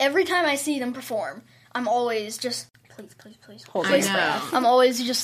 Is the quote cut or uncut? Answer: uncut